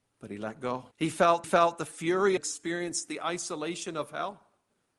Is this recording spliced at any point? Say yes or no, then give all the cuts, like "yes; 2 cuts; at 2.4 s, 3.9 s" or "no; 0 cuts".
yes; 3 cuts; at 0.9 s, 1.4 s, 2.4 s